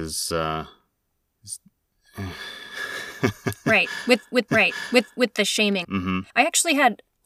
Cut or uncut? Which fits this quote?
cut